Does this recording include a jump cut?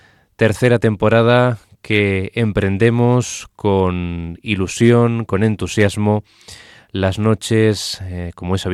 no; 0 cuts

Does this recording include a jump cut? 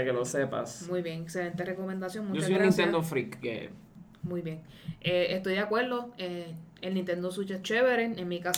yes; 2 cuts; at 3.4 s, 7.6 s

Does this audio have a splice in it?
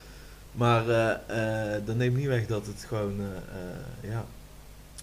no; 0 cuts

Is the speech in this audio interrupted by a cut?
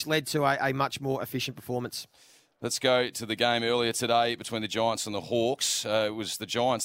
no; 0 cuts

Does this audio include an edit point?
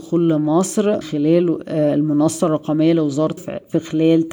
yes; 2 cuts; at 1.0 s, 3.4 s

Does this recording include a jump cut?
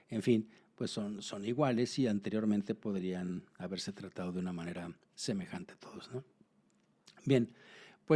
no; 0 cuts

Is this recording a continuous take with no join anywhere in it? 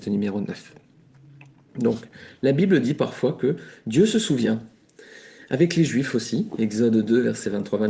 yes; 0 cuts

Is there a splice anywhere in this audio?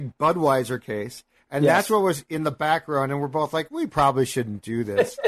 no; 0 cuts

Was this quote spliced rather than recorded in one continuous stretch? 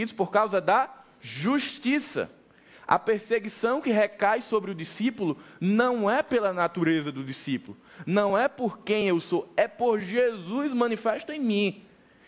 no; 0 cuts

